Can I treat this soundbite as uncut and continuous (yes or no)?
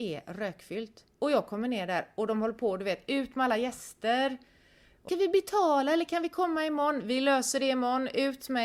no